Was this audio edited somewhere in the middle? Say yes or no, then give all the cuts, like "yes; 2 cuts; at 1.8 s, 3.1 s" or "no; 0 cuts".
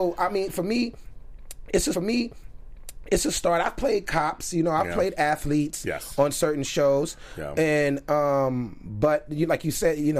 yes; 1 cut; at 1.9 s